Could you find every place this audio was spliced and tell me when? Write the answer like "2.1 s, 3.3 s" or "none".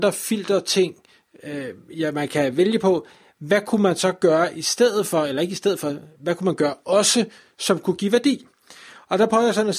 none